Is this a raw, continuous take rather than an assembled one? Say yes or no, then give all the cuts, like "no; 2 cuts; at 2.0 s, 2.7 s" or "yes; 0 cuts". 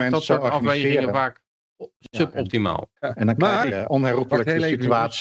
no; 1 cut; at 3.0 s